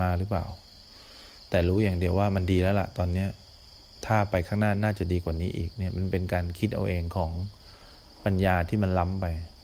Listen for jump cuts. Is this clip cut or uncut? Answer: uncut